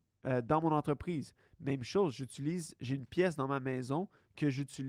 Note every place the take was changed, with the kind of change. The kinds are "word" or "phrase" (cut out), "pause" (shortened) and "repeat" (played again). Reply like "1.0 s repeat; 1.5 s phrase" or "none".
none